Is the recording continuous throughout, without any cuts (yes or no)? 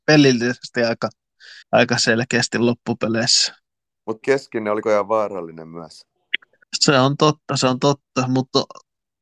no